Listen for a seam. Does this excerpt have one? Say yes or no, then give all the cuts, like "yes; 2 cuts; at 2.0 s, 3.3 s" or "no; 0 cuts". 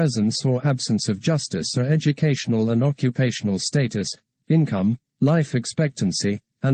no; 0 cuts